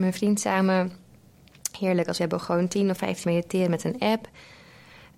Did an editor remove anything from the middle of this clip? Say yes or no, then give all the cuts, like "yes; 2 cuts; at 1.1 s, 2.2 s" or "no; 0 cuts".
yes; 2 cuts; at 2.2 s, 3.2 s